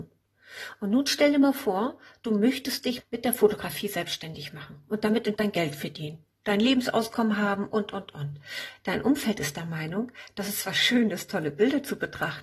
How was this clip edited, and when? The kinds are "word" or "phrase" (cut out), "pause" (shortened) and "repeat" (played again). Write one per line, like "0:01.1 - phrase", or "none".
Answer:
0:03.0 - word
0:05.4 - word